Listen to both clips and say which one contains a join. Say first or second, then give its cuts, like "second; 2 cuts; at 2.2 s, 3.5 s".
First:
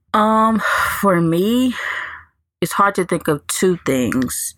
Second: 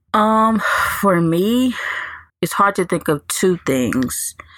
second; 1 cut; at 2.3 s